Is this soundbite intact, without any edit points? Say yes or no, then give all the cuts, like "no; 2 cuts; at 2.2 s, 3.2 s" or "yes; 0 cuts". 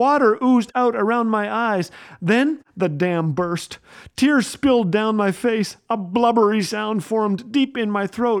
yes; 0 cuts